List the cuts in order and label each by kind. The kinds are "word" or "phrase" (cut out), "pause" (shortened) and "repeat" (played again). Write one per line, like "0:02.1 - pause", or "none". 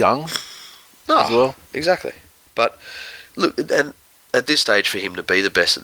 none